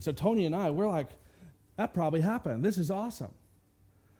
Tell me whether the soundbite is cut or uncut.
uncut